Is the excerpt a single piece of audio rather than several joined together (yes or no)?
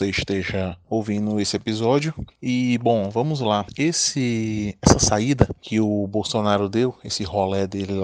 yes